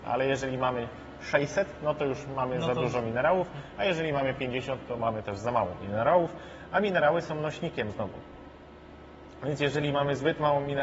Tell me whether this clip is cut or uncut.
uncut